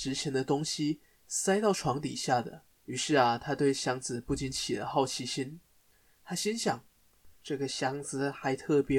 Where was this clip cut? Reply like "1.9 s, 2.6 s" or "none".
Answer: 2.7 s, 7.4 s